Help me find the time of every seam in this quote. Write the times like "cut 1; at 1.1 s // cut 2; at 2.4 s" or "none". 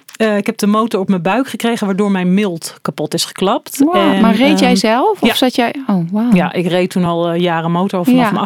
none